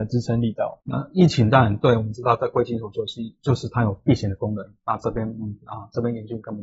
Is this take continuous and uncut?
yes; 0 cuts

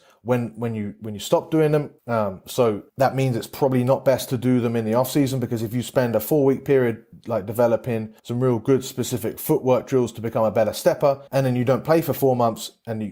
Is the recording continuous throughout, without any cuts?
no; 4 cuts; at 2.0 s, 2.9 s, 8.2 s, 11.3 s

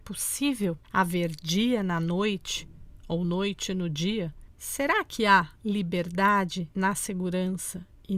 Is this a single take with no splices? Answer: yes; 0 cuts

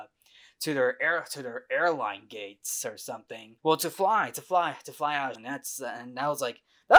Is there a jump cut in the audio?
yes; 2 cuts; at 3.6 s, 5.4 s

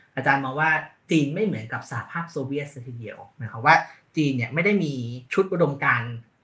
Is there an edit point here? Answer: yes; 1 cut; at 5.3 s

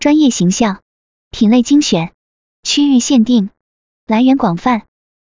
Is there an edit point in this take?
no; 0 cuts

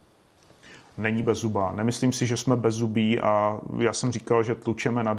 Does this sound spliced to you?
no; 0 cuts

